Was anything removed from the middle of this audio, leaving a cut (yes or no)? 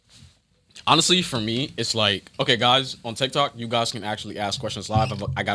no